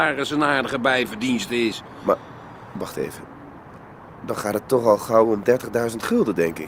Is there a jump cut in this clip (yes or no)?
no